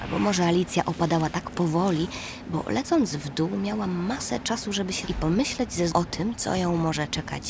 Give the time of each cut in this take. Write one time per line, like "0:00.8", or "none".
0:05.0
0:05.9